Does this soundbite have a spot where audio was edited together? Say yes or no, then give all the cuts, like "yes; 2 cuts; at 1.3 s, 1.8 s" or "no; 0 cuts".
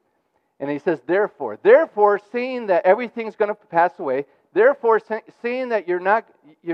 no; 0 cuts